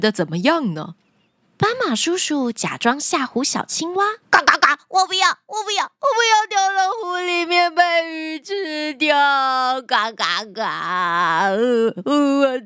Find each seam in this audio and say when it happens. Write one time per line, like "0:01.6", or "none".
0:01.2
0:04.2